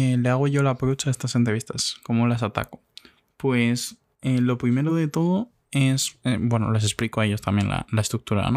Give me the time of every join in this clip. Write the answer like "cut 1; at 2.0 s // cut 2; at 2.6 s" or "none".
none